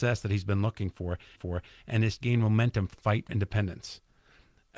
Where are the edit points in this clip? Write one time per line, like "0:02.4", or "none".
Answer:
0:01.4
0:02.2
0:02.9
0:03.3

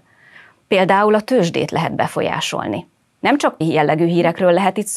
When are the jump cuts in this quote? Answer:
0:03.6

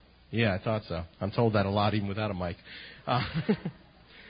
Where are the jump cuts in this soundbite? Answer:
0:01.1

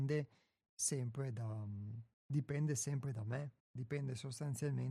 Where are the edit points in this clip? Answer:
0:02.1
0:03.6

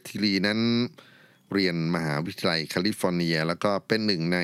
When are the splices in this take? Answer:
none

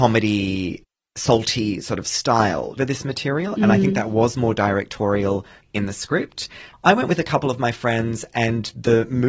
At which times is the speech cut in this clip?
0:02.8
0:05.6
0:06.7

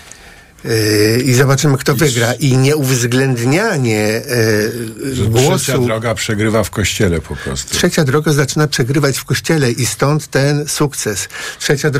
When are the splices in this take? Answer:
none

